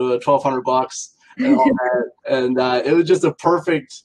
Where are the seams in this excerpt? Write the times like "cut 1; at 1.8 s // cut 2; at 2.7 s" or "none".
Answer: cut 1; at 2.2 s

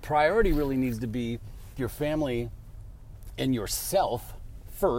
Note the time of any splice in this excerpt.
cut 1; at 1.8 s

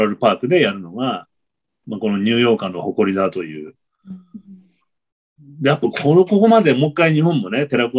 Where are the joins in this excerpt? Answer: none

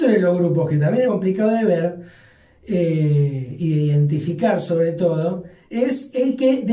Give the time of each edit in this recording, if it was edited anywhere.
cut 1; at 1.1 s

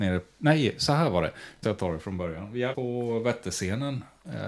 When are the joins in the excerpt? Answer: cut 1; at 1.6 s // cut 2; at 2.7 s

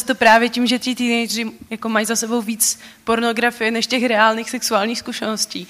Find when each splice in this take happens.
none

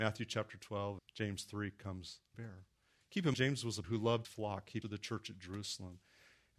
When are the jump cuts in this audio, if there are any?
cut 1; at 1.0 s // cut 2; at 2.3 s // cut 3; at 3.3 s // cut 4; at 3.8 s // cut 5; at 4.2 s // cut 6; at 4.8 s

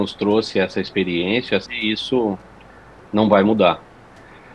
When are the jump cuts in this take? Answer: cut 1; at 1.7 s

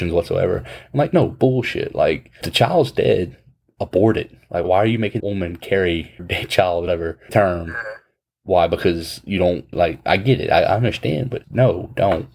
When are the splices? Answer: cut 1; at 2.4 s // cut 2; at 4.6 s // cut 3; at 5.2 s // cut 4; at 6.2 s // cut 5; at 6.9 s // cut 6; at 7.3 s // cut 7; at 9.7 s // cut 8; at 11.4 s

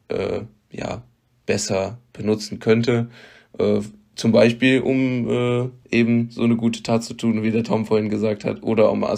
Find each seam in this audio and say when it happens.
none

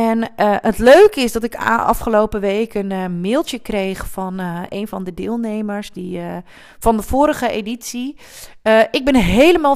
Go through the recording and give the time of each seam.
none

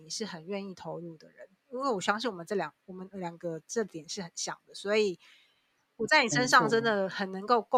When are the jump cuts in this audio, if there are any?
none

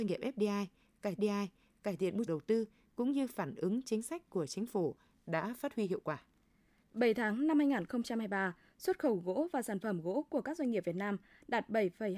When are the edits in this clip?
cut 1; at 1.2 s // cut 2; at 2.3 s

